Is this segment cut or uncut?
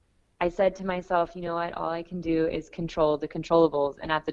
uncut